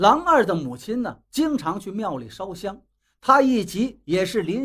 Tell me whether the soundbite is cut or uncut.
uncut